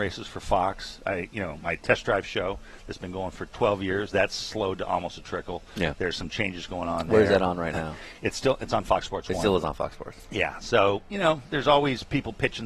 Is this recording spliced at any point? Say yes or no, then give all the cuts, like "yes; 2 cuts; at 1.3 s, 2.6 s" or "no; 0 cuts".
no; 0 cuts